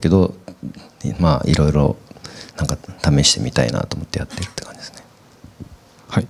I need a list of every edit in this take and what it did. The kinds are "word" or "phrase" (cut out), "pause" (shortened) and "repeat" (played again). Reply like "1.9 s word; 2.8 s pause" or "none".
2.5 s pause

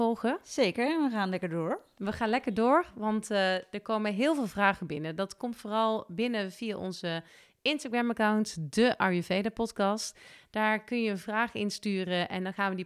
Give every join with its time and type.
none

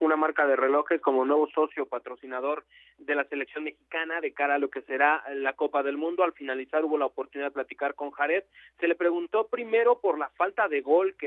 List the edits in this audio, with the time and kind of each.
none

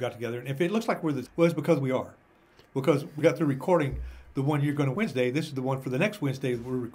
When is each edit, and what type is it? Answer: 1.2 s word; 3.2 s word; 4.9 s word

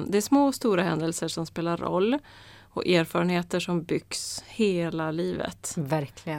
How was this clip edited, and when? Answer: none

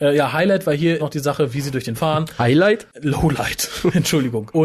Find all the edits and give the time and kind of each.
1.0 s word; 1.9 s word

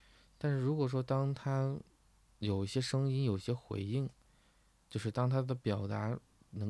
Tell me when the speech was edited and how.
none

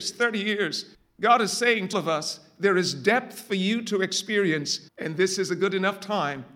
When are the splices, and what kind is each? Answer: 0.9 s pause; 1.9 s word; 4.9 s pause

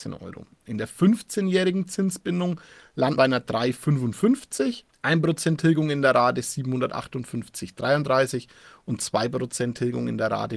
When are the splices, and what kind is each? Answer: 3.2 s word

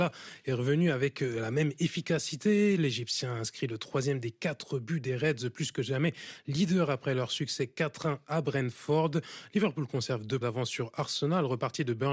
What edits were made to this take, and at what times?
10.4 s word

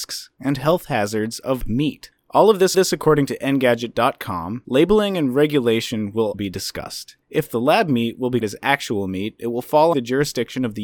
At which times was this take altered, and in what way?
1.6 s word; 2.7 s repeat; 6.3 s word; 7.2 s pause; 8.4 s word; 9.9 s word

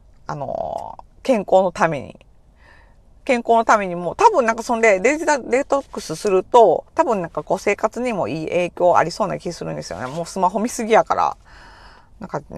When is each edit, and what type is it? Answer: 6.9 s pause

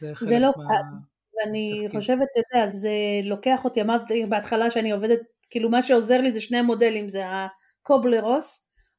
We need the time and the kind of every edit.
2.7 s word

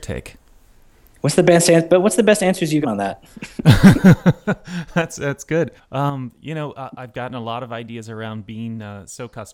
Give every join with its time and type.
2.8 s word; 5.8 s pause

